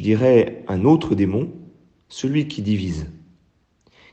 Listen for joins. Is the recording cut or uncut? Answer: uncut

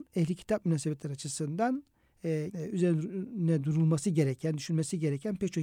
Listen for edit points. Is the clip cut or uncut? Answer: cut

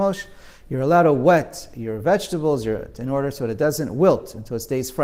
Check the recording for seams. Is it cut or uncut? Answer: uncut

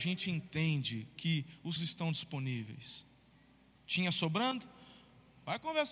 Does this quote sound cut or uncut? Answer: cut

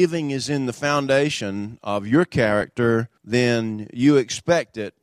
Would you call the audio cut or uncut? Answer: cut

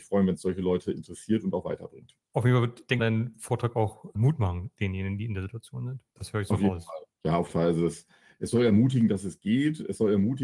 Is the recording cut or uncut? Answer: cut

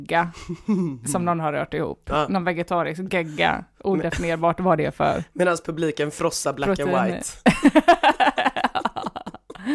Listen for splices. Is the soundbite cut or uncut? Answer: uncut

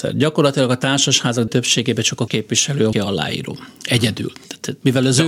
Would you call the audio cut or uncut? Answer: cut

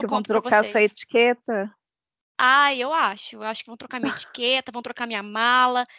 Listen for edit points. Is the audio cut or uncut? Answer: uncut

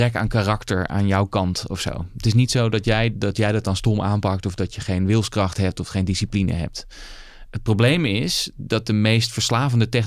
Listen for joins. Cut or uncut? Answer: uncut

